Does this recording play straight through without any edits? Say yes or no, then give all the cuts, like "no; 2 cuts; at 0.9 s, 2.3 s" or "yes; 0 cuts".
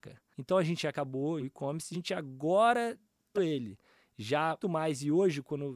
no; 4 cuts; at 1.4 s, 1.9 s, 3.3 s, 4.6 s